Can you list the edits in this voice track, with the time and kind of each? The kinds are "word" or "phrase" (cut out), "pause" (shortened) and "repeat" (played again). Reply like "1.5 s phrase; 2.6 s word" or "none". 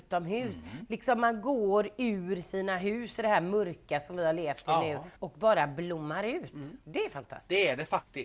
5.2 s pause; 6.8 s pause